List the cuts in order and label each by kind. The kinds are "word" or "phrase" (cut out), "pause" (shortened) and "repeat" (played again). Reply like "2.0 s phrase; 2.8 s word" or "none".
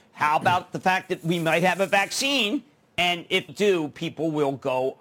3.5 s word

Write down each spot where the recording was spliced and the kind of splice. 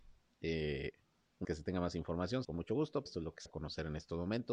1.4 s word; 2.4 s phrase; 3.1 s word; 3.5 s word

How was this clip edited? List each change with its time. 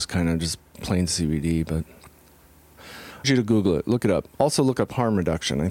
3.2 s phrase; 4.3 s pause

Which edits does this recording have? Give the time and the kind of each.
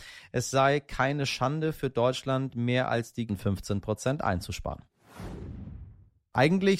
3.3 s word

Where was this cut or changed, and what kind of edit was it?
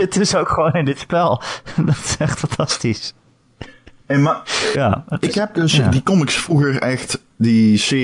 4.7 s phrase

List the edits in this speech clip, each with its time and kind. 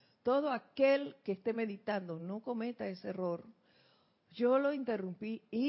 none

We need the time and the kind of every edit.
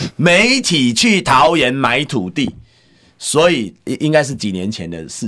3.8 s pause

